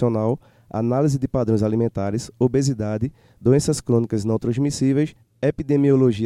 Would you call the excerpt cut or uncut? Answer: uncut